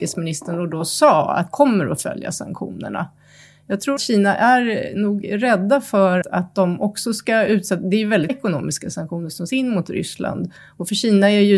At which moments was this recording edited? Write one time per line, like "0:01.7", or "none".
0:01.5
0:04.0
0:06.2
0:08.3
0:09.5

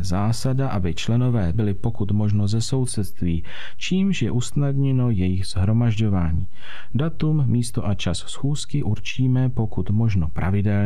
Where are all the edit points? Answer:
0:01.5

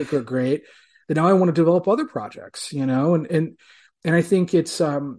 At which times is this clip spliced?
none

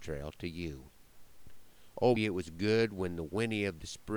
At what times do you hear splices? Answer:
0:02.2

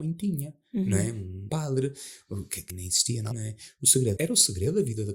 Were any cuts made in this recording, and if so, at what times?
0:01.5
0:02.7
0:03.3
0:04.2

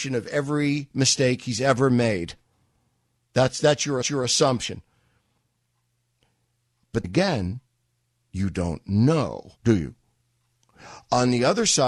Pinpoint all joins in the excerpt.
0:04.0
0:07.0
0:09.6

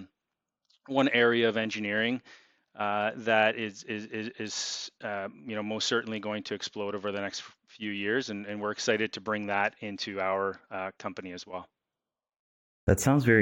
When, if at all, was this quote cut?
none

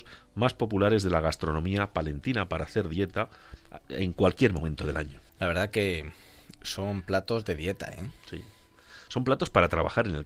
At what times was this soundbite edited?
0:05.3

